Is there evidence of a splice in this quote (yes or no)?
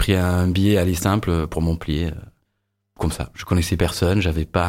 no